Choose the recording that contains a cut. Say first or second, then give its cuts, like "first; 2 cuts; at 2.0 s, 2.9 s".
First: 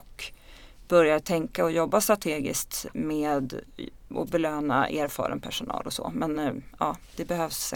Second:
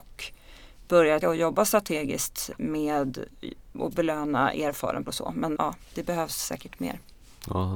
second; 3 cuts; at 1.2 s, 5.0 s, 5.6 s